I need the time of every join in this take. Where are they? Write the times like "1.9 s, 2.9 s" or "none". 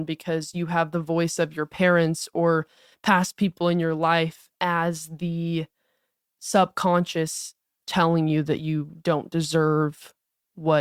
none